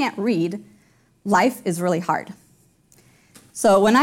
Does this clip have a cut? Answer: no; 0 cuts

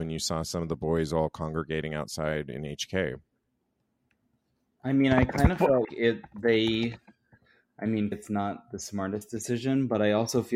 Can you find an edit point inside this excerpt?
yes; 2 cuts; at 5.8 s, 8.1 s

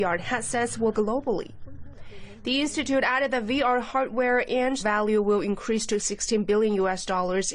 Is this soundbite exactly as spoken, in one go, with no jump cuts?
no; 2 cuts; at 0.9 s, 4.8 s

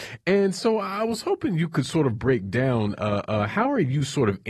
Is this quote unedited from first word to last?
yes; 0 cuts

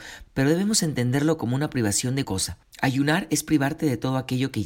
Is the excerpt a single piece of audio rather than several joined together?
no; 1 cut; at 2.2 s

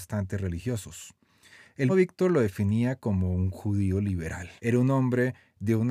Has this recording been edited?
yes; 2 cuts; at 1.9 s, 4.6 s

